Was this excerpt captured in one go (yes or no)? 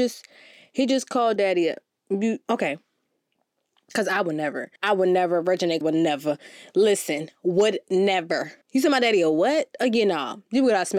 no